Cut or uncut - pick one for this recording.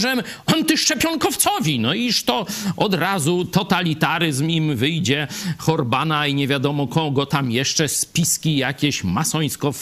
uncut